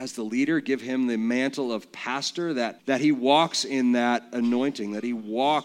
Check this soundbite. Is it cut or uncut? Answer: cut